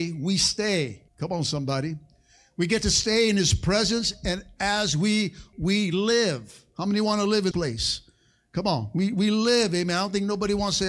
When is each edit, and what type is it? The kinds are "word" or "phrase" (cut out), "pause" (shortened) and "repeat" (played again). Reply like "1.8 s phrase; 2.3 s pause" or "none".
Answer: 1.1 s pause; 5.5 s word; 7.5 s word